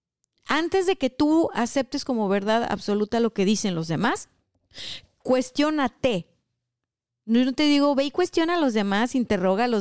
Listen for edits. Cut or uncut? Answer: uncut